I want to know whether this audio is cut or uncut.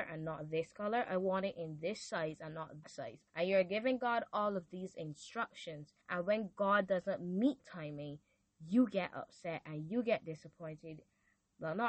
cut